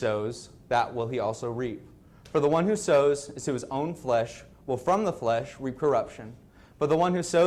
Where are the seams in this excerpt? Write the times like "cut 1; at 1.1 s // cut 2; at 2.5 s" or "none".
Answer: none